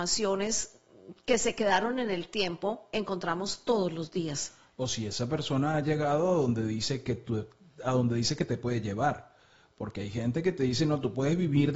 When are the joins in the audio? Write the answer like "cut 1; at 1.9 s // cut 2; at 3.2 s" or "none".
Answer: none